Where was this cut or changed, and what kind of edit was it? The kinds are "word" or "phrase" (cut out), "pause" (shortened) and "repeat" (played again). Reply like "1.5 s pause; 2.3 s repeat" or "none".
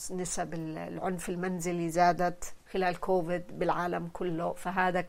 none